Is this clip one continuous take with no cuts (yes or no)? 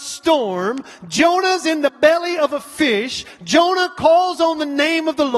yes